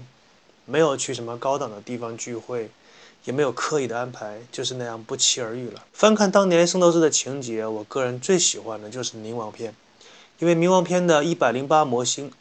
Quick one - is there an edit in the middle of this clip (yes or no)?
yes